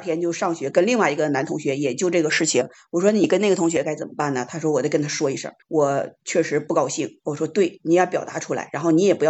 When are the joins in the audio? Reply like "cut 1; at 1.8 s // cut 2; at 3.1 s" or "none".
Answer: cut 1; at 5.6 s